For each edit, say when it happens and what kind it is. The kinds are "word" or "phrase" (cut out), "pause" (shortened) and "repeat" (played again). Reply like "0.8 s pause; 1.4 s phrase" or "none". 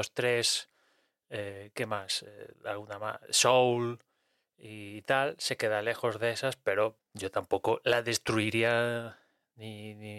2.5 s pause; 7.0 s word